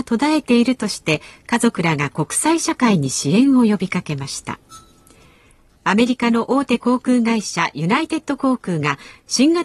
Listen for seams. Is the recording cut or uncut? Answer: uncut